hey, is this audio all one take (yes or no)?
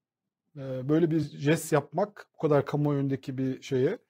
yes